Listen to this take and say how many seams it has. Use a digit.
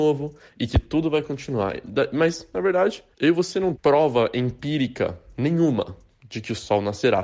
2